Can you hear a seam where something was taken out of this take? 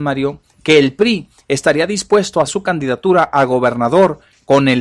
yes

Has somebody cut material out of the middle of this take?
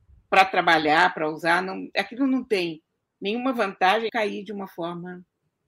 yes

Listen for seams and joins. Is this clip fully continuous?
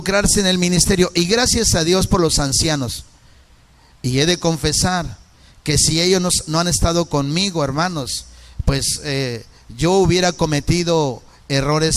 yes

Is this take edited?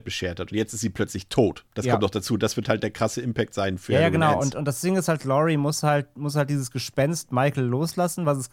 yes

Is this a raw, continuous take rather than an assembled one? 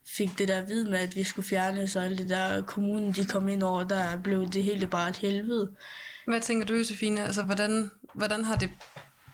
yes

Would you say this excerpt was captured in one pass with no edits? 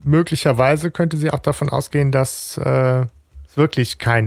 yes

